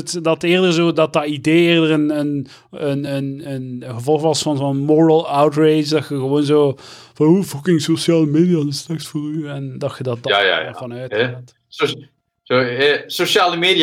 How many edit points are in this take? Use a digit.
0